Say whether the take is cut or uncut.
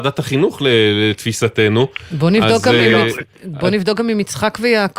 uncut